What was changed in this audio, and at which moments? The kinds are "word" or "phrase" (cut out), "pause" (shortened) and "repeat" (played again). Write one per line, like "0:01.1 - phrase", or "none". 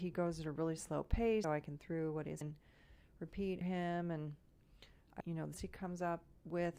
0:01.4 - word
0:01.8 - word
0:02.4 - word
0:03.6 - word
0:05.2 - word
0:05.5 - word